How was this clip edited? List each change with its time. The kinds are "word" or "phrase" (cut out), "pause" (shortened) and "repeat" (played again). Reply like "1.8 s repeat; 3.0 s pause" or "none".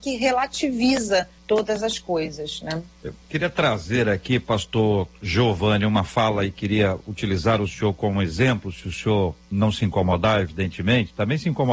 1.4 s pause; 9.4 s pause